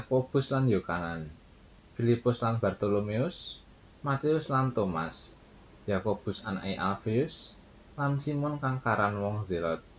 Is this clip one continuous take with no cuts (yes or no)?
yes